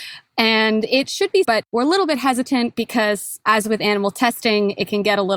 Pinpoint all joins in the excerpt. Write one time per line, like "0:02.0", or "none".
0:01.4